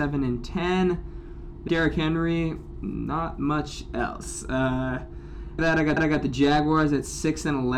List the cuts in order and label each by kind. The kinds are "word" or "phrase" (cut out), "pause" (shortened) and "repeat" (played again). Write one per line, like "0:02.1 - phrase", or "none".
0:01.7 - word
0:05.6 - word
0:06.0 - repeat